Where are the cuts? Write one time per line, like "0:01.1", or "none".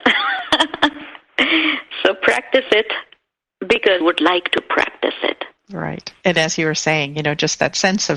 0:04.0
0:05.6